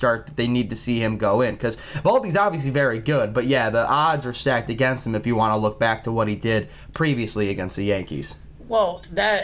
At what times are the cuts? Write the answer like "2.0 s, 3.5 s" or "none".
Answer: none